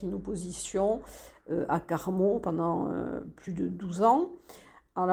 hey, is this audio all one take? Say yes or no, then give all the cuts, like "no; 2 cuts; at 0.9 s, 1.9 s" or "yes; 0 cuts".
yes; 0 cuts